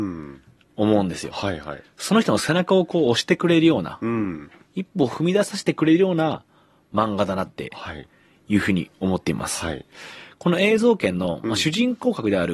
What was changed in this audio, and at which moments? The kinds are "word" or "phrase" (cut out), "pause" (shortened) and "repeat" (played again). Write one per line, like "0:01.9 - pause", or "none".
none